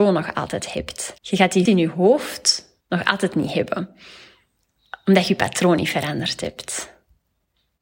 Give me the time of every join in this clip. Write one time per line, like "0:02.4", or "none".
0:01.2
0:01.7
0:02.8